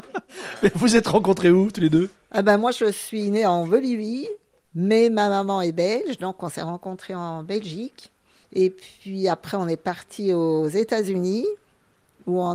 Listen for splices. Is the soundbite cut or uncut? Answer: uncut